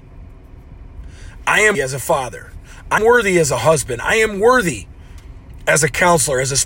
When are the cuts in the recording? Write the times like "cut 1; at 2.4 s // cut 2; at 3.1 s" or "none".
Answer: cut 1; at 1.7 s // cut 2; at 3.0 s